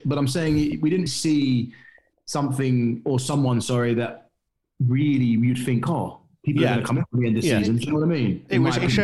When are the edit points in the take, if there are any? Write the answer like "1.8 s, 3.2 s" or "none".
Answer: 1.1 s